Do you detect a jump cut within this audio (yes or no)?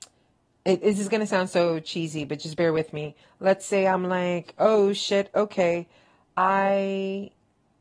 no